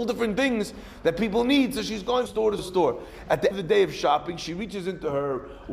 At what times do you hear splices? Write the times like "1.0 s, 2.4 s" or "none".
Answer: 2.3 s, 2.6 s, 3.5 s

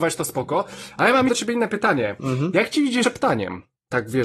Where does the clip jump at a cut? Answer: 1.3 s, 3.0 s

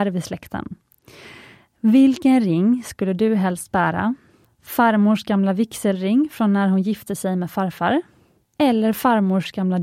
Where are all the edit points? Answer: none

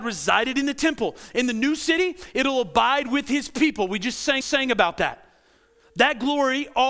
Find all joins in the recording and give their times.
4.4 s

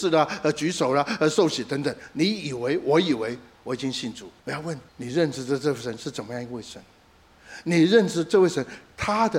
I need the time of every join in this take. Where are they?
4.4 s, 4.9 s

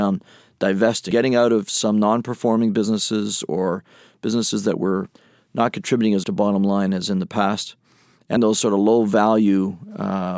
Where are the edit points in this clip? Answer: 1.1 s, 6.2 s, 8.4 s

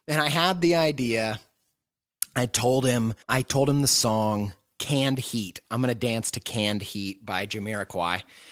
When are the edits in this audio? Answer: 3.2 s

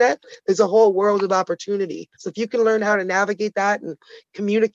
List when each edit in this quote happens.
2.1 s

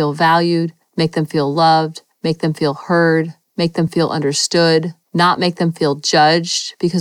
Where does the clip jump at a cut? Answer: none

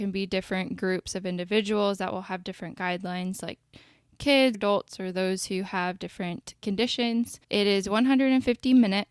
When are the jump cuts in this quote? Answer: 4.5 s, 7.4 s

